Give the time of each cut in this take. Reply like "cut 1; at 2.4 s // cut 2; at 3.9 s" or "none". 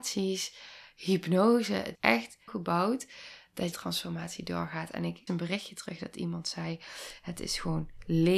cut 1; at 2.0 s // cut 2; at 2.5 s // cut 3; at 3.7 s // cut 4; at 5.3 s